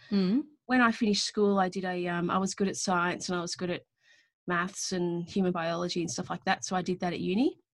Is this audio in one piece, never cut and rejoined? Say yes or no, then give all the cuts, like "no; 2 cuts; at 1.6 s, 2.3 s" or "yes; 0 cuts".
yes; 0 cuts